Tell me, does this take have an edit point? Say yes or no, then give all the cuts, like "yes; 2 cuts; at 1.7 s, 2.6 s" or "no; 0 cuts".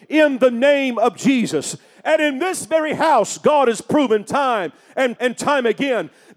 yes; 1 cut; at 5.2 s